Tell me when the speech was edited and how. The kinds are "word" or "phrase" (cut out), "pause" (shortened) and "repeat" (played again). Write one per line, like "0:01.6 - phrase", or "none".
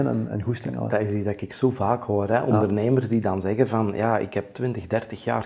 none